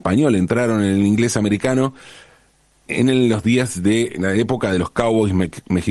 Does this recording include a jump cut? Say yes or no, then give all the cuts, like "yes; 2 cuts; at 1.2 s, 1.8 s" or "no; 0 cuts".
yes; 1 cut; at 2.9 s